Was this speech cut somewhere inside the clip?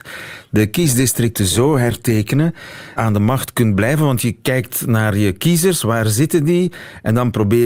yes; 1 cut; at 3.0 s

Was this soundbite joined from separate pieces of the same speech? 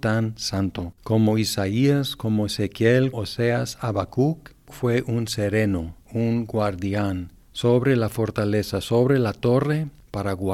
yes; 2 cuts; at 1.0 s, 3.1 s

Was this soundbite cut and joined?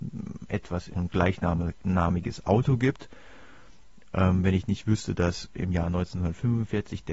yes; 1 cut; at 0.9 s

